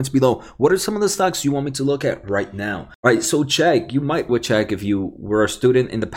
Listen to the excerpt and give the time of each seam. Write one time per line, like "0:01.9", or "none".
0:04.3